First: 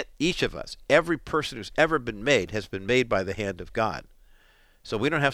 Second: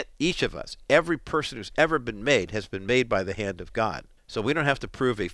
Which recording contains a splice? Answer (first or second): second